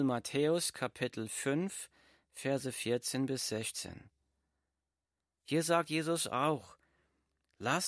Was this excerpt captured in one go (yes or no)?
yes